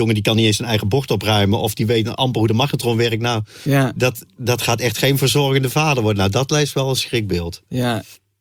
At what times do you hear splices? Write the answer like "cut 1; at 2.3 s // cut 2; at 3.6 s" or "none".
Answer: none